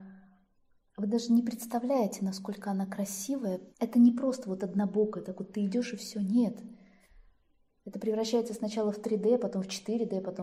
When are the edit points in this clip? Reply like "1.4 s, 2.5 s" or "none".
3.7 s